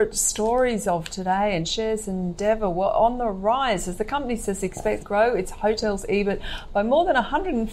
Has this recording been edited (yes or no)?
yes